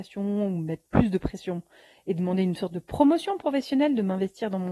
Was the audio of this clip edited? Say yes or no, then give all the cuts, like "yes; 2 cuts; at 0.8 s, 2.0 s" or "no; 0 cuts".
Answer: no; 0 cuts